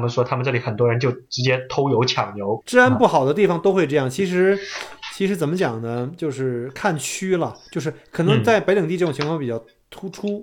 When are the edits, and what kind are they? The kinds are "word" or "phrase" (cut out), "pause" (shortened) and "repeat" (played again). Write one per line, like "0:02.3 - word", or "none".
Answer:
0:02.6 - word